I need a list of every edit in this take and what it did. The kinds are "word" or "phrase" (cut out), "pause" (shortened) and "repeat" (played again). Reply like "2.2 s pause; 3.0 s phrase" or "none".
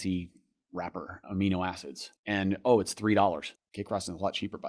1.2 s word; 2.2 s pause; 3.5 s pause